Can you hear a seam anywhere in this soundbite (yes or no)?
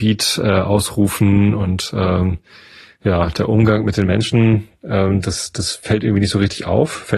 no